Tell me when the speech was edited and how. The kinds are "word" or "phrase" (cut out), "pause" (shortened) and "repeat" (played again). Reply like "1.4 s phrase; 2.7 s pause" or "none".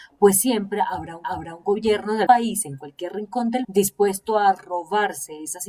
1.2 s repeat; 2.3 s word; 3.6 s word